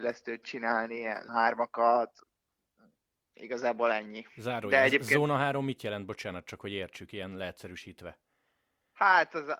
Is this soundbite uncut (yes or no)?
no